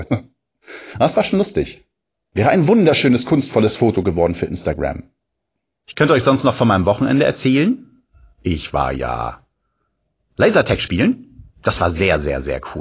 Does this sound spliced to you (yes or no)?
no